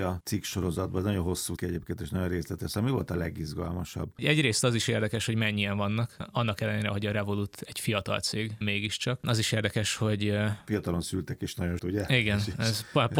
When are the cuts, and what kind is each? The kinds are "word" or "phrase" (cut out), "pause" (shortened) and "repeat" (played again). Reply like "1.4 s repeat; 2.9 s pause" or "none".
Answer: 1.6 s word; 8.6 s word; 11.8 s word